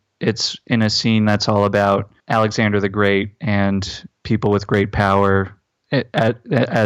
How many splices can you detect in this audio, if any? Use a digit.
1